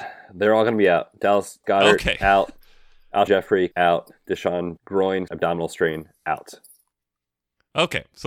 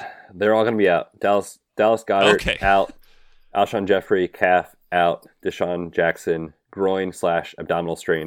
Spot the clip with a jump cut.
first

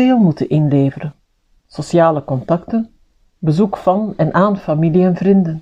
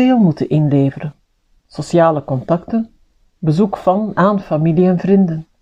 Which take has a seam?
second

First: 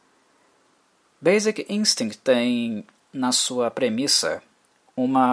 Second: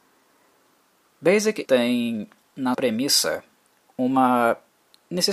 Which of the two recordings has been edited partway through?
second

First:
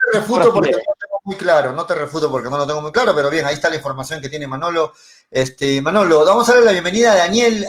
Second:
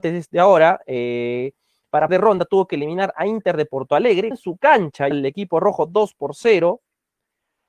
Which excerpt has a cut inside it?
second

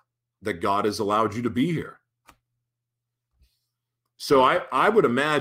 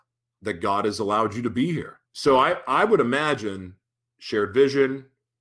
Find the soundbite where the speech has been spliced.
second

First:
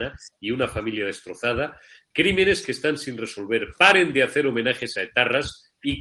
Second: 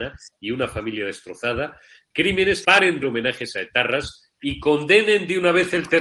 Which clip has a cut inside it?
second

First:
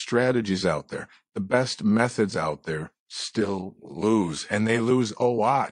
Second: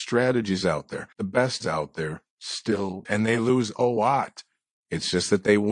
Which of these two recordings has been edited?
second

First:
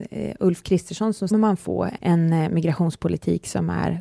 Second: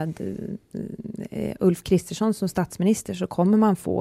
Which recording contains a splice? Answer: first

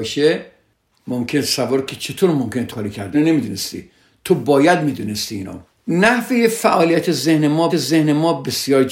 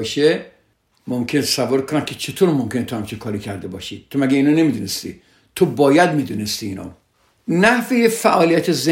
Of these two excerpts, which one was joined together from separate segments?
first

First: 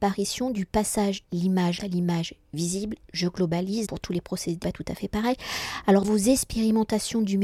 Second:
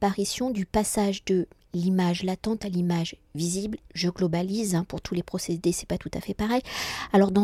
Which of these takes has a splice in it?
first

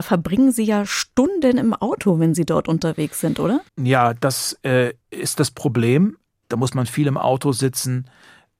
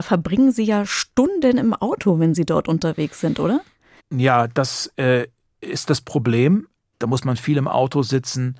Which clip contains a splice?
first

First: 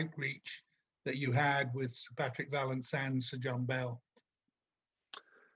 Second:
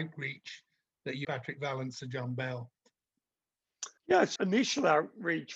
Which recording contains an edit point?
second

